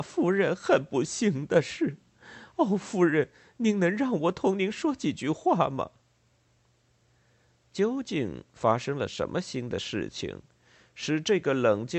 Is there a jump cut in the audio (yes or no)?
no